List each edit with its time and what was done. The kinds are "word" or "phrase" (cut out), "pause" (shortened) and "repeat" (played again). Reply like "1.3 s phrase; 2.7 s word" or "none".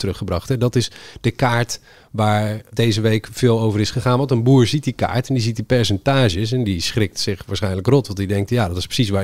none